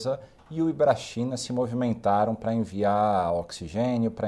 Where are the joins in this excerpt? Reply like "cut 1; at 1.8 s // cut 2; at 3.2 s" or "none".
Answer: none